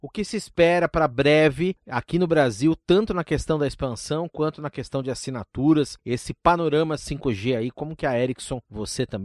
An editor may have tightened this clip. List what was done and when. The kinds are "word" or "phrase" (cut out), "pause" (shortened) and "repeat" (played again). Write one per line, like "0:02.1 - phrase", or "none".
none